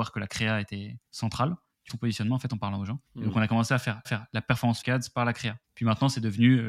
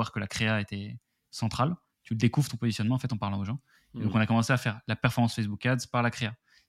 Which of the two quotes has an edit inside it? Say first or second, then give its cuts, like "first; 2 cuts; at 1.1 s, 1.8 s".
first; 6 cuts; at 1.1 s, 1.9 s, 3.1 s, 4.0 s, 4.8 s, 5.6 s